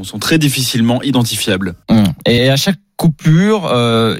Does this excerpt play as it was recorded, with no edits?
no; 1 cut; at 2.4 s

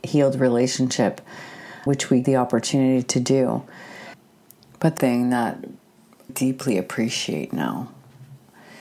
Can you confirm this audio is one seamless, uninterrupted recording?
no; 4 cuts; at 1.9 s, 2.2 s, 5.0 s, 6.3 s

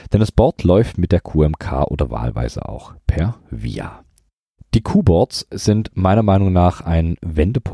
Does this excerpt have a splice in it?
no; 0 cuts

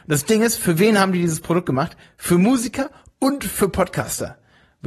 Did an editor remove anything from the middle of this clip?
no; 0 cuts

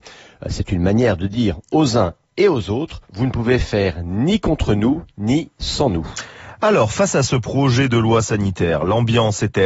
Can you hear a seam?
yes; 1 cut; at 3.0 s

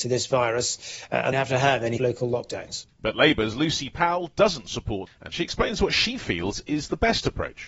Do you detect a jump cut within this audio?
yes; 4 cuts; at 1.3 s, 2.0 s, 2.9 s, 5.1 s

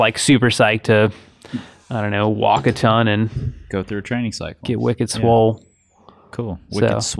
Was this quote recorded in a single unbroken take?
yes; 0 cuts

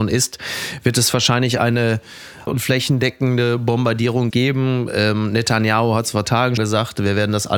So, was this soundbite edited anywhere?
yes; 4 cuts; at 2.5 s, 4.3 s, 6.2 s, 6.6 s

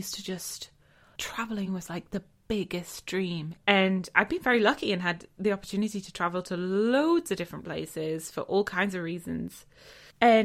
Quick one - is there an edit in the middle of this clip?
no; 0 cuts

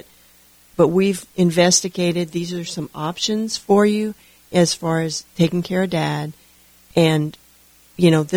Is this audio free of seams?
no; 2 cuts; at 1.3 s, 5.3 s

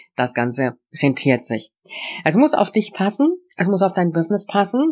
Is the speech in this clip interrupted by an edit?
no; 0 cuts

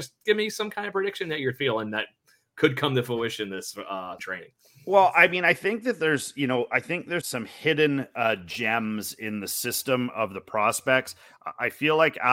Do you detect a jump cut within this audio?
yes; 2 cuts; at 4.2 s, 7.2 s

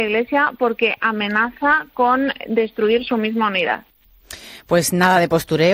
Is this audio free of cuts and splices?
yes; 0 cuts

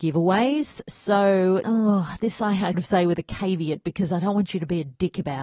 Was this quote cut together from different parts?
yes; 2 cuts; at 1.6 s, 2.7 s

